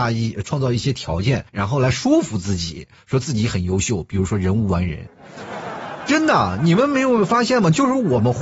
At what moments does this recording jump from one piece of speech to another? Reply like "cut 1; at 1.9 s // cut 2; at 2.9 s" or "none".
cut 1; at 1.5 s